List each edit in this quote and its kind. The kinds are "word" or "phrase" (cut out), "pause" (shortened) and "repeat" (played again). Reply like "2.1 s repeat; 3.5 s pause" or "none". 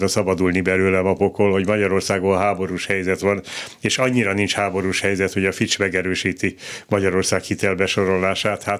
none